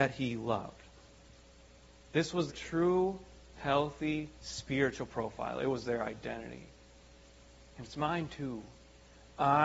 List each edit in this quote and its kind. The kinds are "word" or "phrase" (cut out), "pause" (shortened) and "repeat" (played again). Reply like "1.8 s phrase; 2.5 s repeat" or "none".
2.5 s word; 4.4 s pause